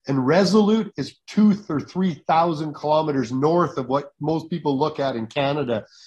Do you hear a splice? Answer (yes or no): yes